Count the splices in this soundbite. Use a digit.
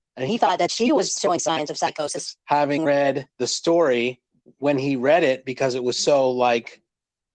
3